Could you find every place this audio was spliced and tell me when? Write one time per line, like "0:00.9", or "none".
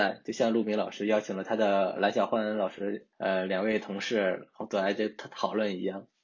0:03.1